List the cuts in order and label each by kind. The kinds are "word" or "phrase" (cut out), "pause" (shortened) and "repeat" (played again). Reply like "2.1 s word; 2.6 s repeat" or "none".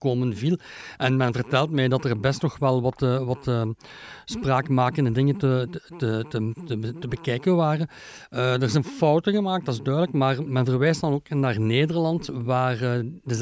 10.5 s word